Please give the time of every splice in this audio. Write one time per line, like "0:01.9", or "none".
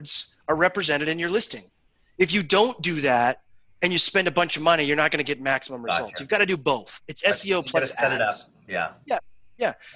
none